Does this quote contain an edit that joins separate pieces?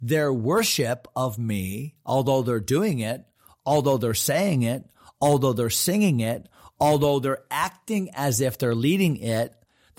no; 0 cuts

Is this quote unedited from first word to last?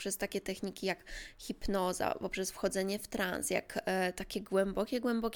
yes; 0 cuts

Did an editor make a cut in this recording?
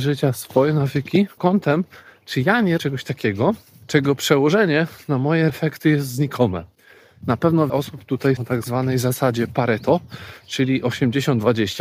yes; 5 cuts; at 1.4 s, 2.8 s, 5.5 s, 7.7 s, 8.4 s

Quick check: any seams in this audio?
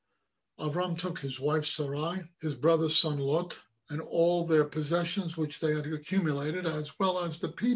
yes; 1 cut; at 2.3 s

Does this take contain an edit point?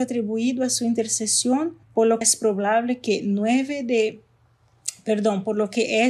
yes; 2 cuts; at 1.8 s, 2.2 s

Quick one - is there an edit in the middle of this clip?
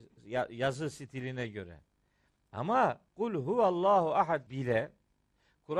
yes; 2 cuts; at 3.1 s, 4.5 s

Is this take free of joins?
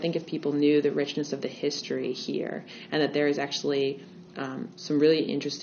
yes; 0 cuts

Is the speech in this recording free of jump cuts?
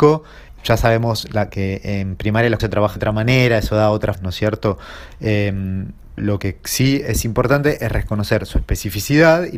no; 4 cuts; at 2.6 s, 3.0 s, 4.1 s, 6.2 s

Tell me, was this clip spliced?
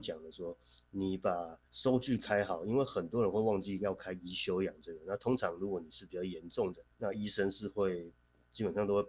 yes; 2 cuts; at 1.7 s, 6.9 s

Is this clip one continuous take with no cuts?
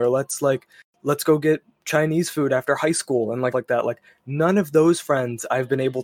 no; 1 cut; at 3.5 s

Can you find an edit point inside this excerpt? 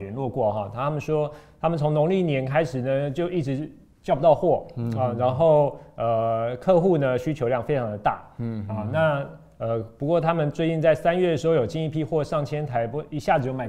no; 0 cuts

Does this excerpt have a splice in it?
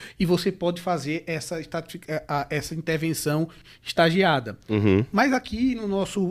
no; 0 cuts

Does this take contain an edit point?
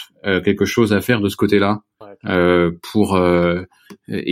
no; 0 cuts

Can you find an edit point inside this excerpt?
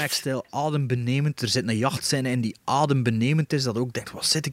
no; 0 cuts

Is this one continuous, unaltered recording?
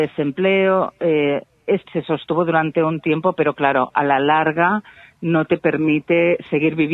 no; 1 cut; at 1.9 s

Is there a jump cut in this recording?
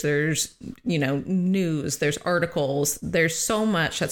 no; 0 cuts

